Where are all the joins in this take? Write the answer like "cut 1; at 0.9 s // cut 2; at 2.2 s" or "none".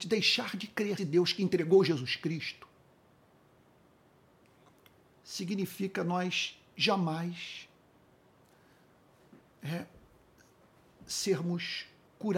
cut 1; at 1.0 s